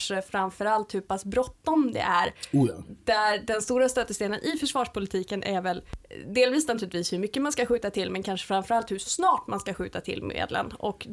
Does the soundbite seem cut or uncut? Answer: uncut